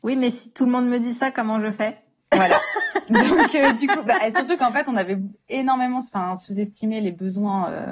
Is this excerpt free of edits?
yes; 0 cuts

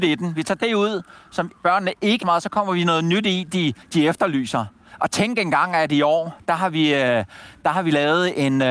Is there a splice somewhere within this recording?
yes; 3 cuts; at 1.6 s, 2.2 s, 3.8 s

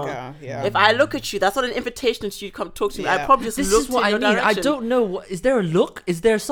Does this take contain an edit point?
no; 0 cuts

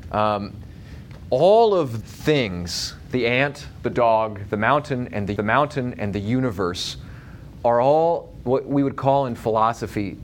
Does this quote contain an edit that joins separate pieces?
yes; 2 cuts; at 2.0 s, 5.4 s

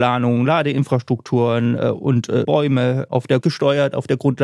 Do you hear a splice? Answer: yes; 2 cuts; at 2.4 s, 3.4 s

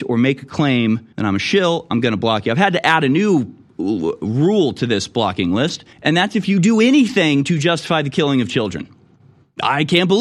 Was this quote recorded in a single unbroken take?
no; 2 cuts; at 1.1 s, 5.9 s

